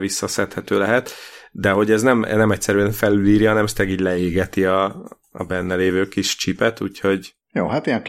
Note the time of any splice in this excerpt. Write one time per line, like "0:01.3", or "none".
none